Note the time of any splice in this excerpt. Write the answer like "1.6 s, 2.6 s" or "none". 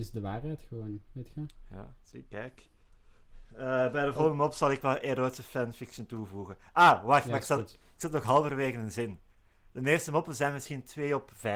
none